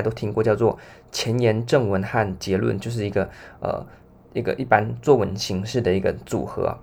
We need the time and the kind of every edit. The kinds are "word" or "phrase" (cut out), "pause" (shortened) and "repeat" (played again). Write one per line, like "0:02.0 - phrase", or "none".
none